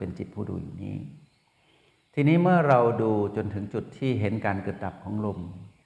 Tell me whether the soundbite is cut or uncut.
uncut